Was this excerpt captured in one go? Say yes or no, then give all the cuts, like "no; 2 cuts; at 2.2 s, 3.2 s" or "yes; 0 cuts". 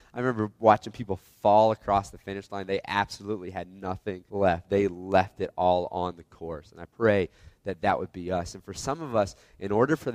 no; 2 cuts; at 4.3 s, 6.9 s